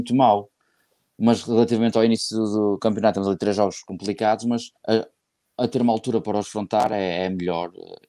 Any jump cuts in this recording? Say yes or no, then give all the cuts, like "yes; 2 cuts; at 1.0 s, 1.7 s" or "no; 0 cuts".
yes; 1 cut; at 4.8 s